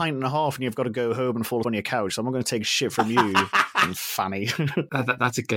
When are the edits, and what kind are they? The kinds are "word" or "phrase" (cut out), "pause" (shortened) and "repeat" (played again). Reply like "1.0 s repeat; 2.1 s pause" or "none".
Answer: 1.6 s word

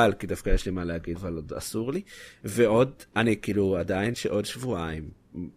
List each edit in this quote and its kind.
1.2 s word; 4.1 s phrase

